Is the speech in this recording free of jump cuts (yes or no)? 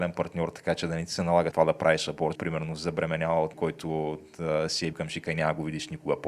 no